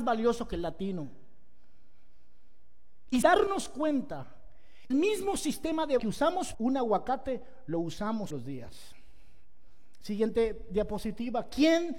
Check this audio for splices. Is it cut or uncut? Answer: cut